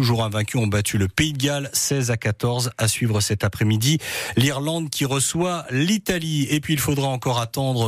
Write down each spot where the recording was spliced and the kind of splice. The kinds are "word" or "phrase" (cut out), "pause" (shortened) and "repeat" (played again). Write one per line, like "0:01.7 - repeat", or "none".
none

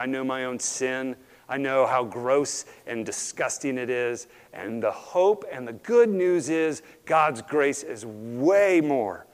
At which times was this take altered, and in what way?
none

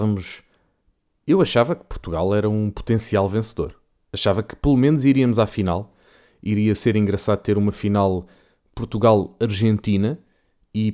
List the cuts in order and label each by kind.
none

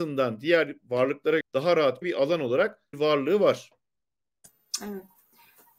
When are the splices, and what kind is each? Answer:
0:01.4 - word
0:02.0 - word
0:02.9 - word

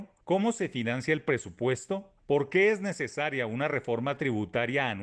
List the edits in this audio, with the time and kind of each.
none

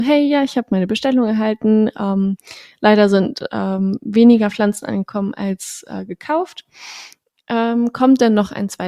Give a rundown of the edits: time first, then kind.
none

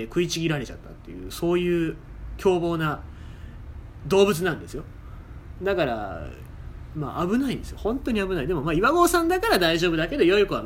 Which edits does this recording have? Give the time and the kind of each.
0:03.6 - word

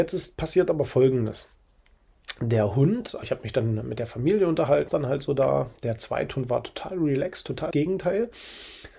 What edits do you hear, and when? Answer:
0:03.2 - word
0:03.8 - word
0:04.9 - word
0:07.7 - word

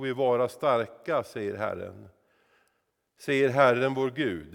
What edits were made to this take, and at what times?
none

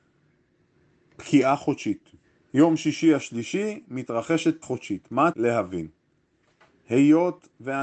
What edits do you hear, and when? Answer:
0:02.2 - pause
0:04.6 - word
0:05.3 - word

